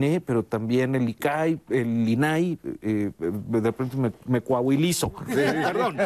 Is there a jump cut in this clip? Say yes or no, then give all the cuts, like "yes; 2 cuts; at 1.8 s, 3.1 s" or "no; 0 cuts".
no; 0 cuts